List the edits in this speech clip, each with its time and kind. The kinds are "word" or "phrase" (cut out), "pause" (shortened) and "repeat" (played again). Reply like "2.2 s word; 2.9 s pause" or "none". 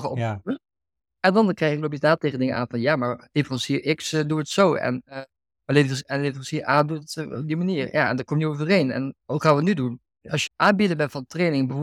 9.2 s pause; 10.5 s word